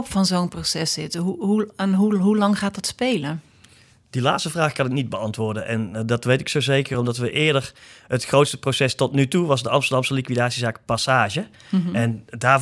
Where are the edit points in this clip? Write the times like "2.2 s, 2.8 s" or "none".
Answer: none